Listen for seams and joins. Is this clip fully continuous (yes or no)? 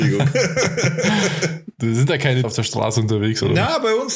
no